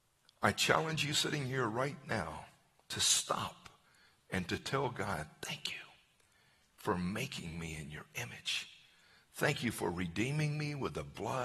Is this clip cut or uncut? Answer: uncut